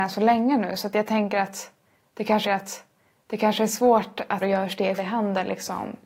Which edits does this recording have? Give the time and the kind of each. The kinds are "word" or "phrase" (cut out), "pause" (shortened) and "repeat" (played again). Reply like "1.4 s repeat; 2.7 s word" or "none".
2.4 s repeat; 4.4 s phrase; 5.0 s phrase